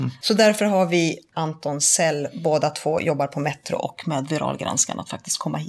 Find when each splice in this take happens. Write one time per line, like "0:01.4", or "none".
0:01.3